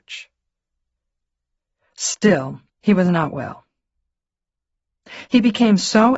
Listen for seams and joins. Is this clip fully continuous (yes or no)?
no